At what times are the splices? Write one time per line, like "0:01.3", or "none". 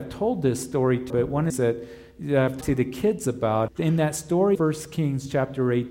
0:01.1
0:01.5
0:02.6
0:03.7
0:04.5